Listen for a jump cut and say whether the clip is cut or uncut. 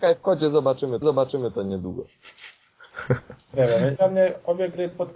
cut